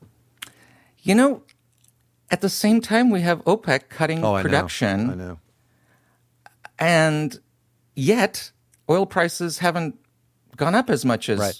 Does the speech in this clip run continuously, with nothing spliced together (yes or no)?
yes